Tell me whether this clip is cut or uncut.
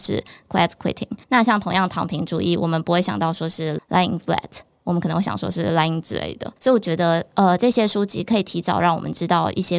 cut